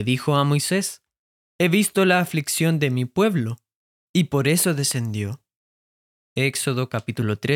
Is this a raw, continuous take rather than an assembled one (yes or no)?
yes